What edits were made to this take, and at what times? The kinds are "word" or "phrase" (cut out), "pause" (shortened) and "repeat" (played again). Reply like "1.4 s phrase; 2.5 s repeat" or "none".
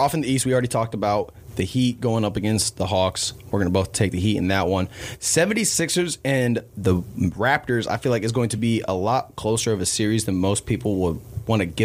none